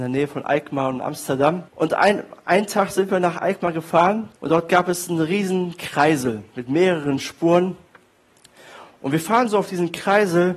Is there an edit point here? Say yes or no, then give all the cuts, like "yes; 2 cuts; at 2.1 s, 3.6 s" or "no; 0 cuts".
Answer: yes; 2 cuts; at 1.7 s, 4.4 s